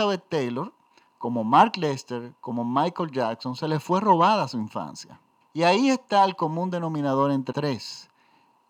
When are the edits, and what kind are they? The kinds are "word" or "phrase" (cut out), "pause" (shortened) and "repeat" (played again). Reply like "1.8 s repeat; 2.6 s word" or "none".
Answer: 5.4 s pause; 7.5 s word